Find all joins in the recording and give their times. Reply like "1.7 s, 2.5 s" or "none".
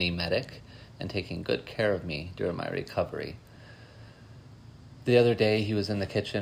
none